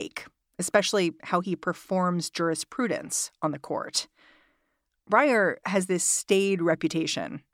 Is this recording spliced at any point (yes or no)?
no